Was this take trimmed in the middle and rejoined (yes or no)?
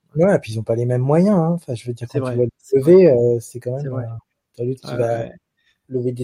no